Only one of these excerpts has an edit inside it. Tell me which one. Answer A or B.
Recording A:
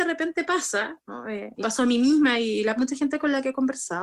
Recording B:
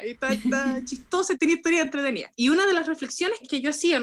A